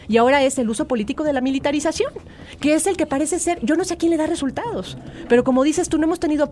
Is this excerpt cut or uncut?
uncut